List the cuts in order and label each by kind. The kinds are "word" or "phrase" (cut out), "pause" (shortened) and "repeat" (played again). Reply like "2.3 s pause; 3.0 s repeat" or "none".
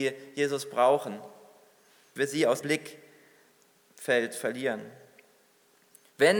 2.2 s word; 2.6 s word